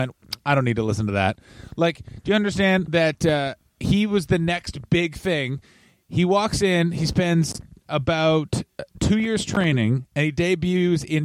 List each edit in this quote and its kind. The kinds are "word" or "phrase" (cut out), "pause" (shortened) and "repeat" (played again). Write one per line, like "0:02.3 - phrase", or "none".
none